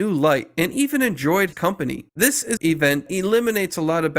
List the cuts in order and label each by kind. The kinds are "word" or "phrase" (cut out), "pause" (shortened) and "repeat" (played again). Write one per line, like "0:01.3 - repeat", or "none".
0:01.5 - word
0:02.1 - pause
0:02.6 - word
0:03.1 - word